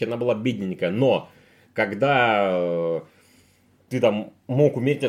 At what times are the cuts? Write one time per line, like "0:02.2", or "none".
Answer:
none